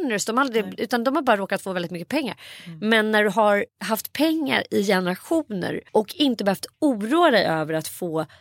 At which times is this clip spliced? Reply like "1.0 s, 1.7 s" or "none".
3.7 s, 5.9 s